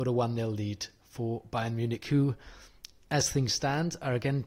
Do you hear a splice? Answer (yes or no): no